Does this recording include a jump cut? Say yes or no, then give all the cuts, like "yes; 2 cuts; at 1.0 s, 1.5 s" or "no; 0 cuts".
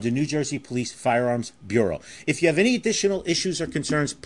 no; 0 cuts